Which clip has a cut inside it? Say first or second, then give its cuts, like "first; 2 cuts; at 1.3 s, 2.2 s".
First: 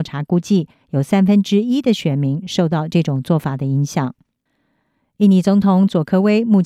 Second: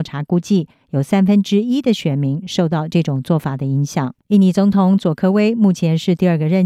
second; 1 cut; at 4.2 s